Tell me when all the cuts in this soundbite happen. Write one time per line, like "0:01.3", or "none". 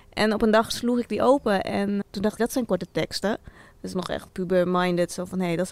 0:02.0
0:02.4
0:03.9
0:04.3